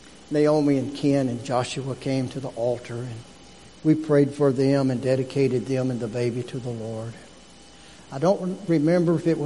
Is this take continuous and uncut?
yes; 0 cuts

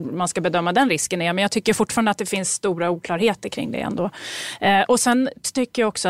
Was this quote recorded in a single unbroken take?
yes; 0 cuts

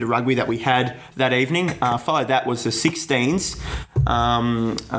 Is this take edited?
no; 0 cuts

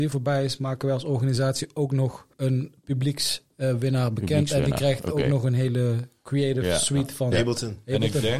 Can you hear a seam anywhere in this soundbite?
yes; 2 cuts; at 2.3 s, 7.3 s

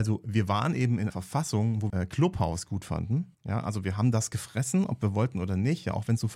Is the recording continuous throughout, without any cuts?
no; 3 cuts; at 1.1 s, 1.9 s, 3.3 s

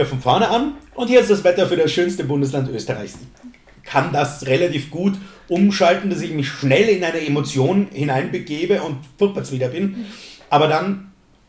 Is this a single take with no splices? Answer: no; 1 cut; at 3.3 s

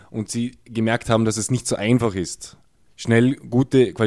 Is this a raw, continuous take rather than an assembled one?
yes; 0 cuts

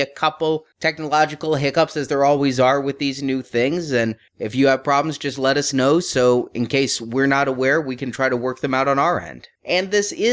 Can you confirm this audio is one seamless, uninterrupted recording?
yes; 0 cuts

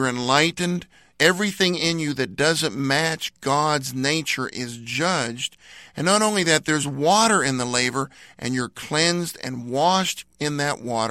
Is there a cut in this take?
no; 0 cuts

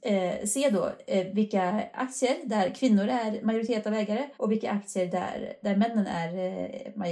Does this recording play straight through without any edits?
no; 1 cut; at 4.3 s

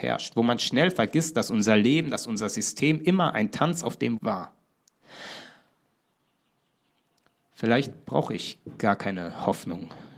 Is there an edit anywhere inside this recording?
yes; 1 cut; at 4.2 s

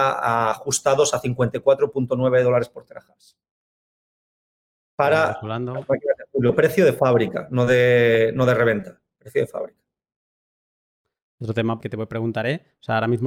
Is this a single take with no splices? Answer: no; 1 cut; at 11.8 s

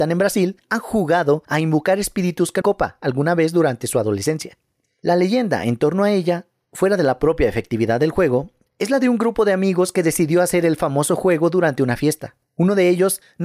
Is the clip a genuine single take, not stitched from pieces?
no; 2 cuts; at 2.6 s, 12.4 s

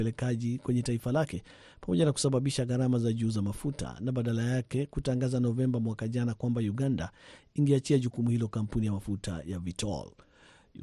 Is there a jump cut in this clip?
no; 0 cuts

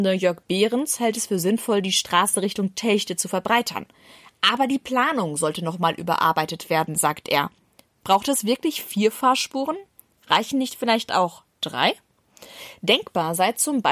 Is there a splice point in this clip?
no; 0 cuts

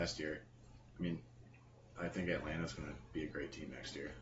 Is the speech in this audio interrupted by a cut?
yes; 2 cuts; at 1.9 s, 3.1 s

